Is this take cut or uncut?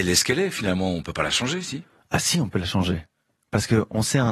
uncut